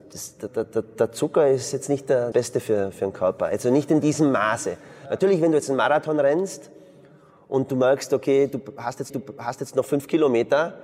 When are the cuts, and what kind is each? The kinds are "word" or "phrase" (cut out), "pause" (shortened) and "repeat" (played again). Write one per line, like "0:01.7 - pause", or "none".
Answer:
0:02.3 - word
0:09.1 - repeat